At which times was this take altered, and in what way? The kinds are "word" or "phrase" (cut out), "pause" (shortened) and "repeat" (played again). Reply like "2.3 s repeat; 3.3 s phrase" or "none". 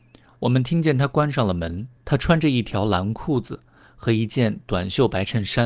2.0 s pause